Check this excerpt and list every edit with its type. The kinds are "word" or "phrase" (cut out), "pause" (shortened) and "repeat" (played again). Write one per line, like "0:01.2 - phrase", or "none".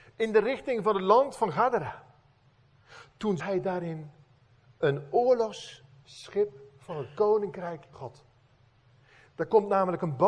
0:03.4 - word
0:07.9 - word

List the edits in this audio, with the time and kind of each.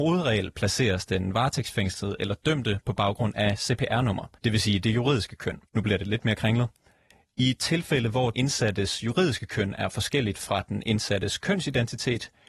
0:04.4 - pause
0:05.7 - pause
0:08.3 - word

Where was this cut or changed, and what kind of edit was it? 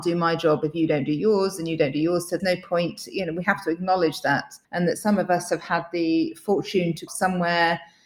0:02.4 - word
0:04.6 - pause
0:07.1 - phrase

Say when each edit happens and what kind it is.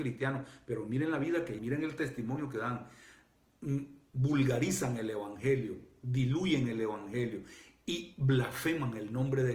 0:01.6 - word

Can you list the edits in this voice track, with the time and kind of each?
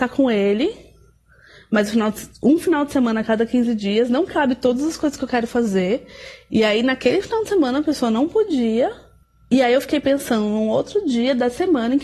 none

